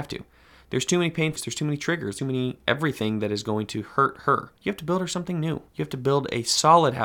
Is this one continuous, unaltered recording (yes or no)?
no